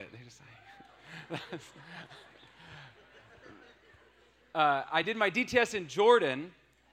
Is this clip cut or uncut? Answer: uncut